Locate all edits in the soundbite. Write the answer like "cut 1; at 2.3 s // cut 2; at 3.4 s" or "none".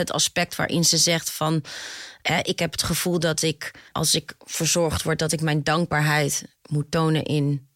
cut 1; at 3.9 s

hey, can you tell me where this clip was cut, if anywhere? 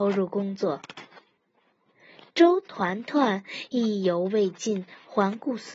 none

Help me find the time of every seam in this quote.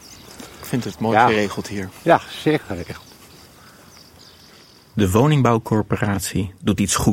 cut 1; at 2.6 s

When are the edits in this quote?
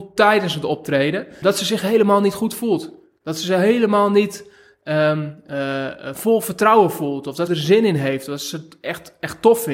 cut 1; at 1.4 s // cut 2; at 7.5 s

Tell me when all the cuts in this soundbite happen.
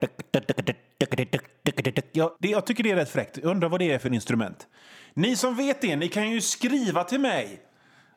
cut 1; at 2.4 s

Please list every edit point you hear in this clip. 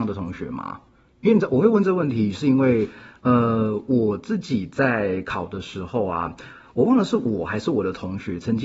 cut 1; at 1.1 s

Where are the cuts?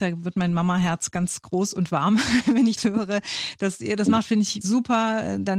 cut 1; at 2.8 s // cut 2; at 4.6 s

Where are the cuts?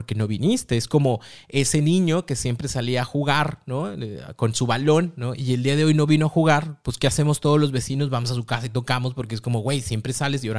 none

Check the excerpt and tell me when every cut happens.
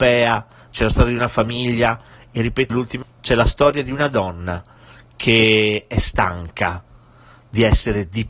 cut 1; at 2.7 s // cut 2; at 3.0 s

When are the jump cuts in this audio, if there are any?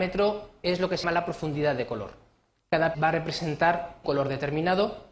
cut 1; at 1.0 s // cut 2; at 2.9 s // cut 3; at 4.0 s

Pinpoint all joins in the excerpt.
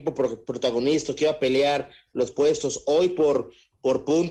cut 1; at 2.3 s

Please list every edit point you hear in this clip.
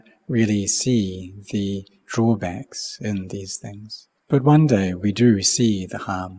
cut 1; at 4.2 s

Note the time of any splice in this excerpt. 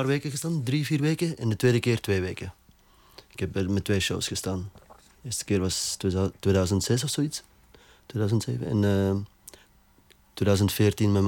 none

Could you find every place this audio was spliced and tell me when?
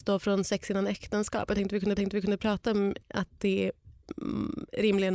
cut 1; at 2.0 s // cut 2; at 3.0 s

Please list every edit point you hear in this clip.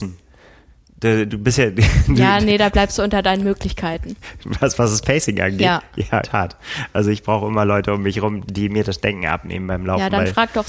cut 1; at 1.3 s // cut 2; at 6.2 s // cut 3; at 8.5 s

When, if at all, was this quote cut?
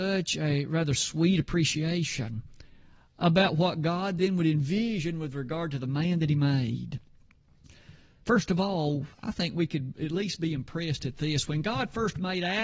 cut 1; at 9.1 s

